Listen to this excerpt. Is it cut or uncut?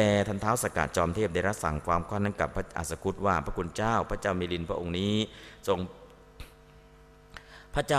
uncut